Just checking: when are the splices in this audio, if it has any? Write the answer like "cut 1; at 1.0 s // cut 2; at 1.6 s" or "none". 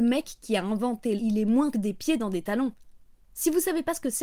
cut 1; at 1.2 s // cut 2; at 1.7 s